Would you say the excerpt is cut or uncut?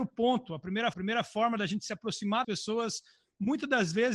cut